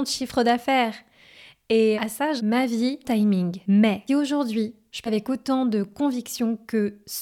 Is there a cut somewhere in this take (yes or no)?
yes